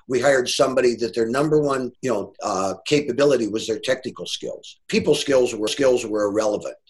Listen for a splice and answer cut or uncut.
cut